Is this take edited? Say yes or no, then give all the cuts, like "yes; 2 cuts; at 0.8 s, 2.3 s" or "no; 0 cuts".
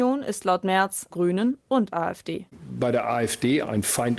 yes; 1 cut; at 1.1 s